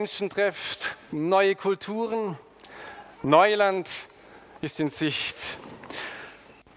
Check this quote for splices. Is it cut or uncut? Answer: uncut